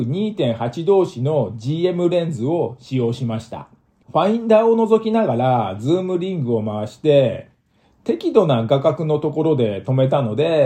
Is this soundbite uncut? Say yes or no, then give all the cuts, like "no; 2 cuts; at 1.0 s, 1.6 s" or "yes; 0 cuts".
yes; 0 cuts